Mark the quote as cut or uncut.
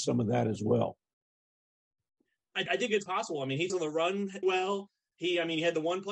cut